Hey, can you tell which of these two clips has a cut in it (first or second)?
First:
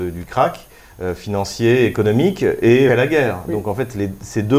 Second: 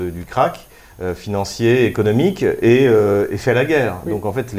first